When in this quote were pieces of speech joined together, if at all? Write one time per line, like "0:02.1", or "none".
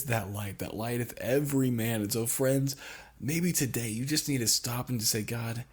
none